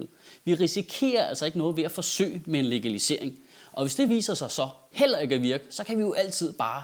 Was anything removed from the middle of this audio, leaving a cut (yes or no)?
no